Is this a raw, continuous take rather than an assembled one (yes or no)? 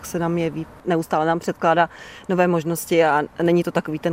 yes